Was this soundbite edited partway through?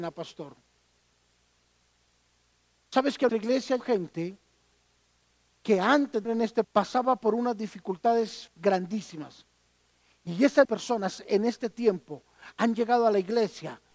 yes; 6 cuts; at 3.3 s, 3.8 s, 6.2 s, 6.6 s, 8.5 s, 10.6 s

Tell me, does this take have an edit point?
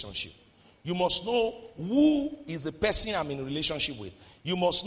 no; 0 cuts

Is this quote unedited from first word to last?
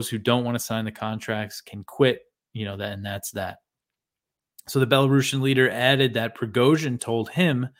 yes; 0 cuts

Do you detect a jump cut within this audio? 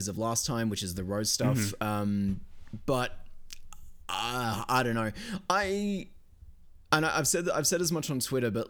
no; 0 cuts

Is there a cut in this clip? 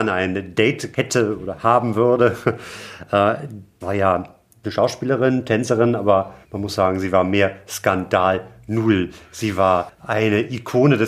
yes; 4 cuts; at 0.9 s, 3.8 s, 4.6 s, 6.4 s

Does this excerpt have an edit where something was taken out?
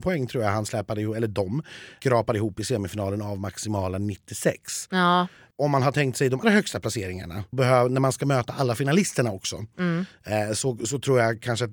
yes; 2 cuts; at 6.4 s, 7.5 s

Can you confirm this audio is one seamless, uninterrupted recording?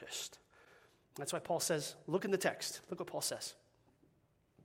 yes; 0 cuts

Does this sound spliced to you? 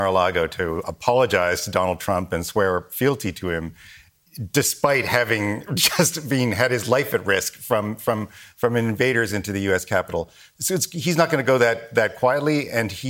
no; 0 cuts

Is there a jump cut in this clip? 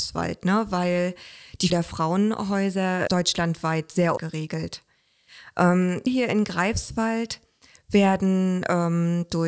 yes; 4 cuts; at 1.7 s, 3.1 s, 4.2 s, 6.1 s

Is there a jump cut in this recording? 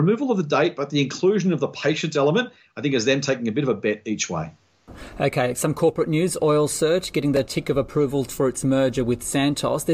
no; 0 cuts

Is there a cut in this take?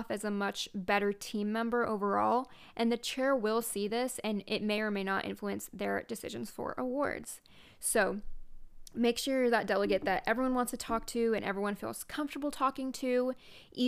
no; 0 cuts

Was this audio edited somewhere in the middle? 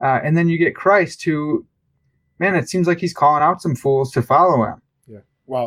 no; 0 cuts

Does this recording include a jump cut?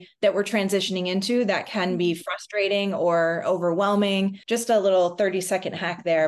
yes; 1 cut; at 4.4 s

